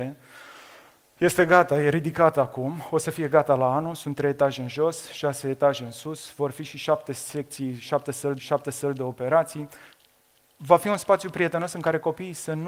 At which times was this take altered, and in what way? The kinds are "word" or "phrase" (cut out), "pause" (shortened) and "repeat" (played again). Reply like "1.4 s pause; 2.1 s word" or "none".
8.4 s repeat